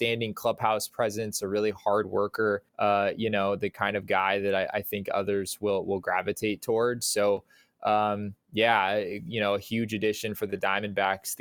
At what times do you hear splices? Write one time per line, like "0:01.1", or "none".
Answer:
0:02.7